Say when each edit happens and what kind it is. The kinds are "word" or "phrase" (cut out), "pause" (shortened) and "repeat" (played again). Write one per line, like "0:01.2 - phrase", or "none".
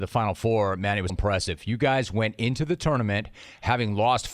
0:01.1 - word